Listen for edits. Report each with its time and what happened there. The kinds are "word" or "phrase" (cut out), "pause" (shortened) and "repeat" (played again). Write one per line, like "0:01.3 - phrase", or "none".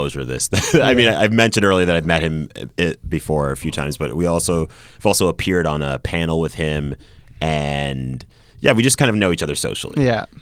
none